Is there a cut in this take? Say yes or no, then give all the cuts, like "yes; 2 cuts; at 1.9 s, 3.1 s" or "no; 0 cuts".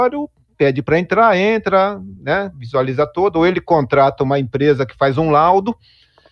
no; 0 cuts